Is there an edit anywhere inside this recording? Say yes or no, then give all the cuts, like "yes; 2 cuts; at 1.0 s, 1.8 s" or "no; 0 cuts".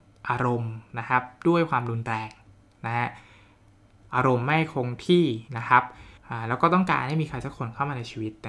yes; 2 cuts; at 5.5 s, 6.2 s